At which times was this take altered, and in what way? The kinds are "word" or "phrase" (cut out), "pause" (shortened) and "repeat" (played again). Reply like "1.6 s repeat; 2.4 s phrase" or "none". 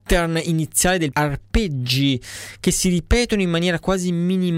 1.1 s word